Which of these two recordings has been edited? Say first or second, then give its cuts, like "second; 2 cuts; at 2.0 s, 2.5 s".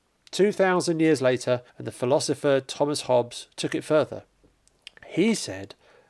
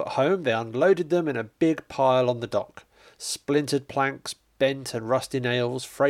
first; 1 cut; at 1.7 s